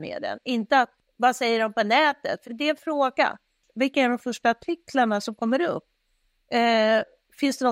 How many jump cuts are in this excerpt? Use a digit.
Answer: 3